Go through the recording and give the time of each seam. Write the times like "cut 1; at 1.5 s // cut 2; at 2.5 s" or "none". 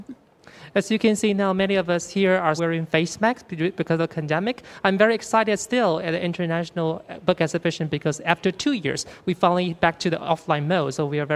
cut 1; at 2.6 s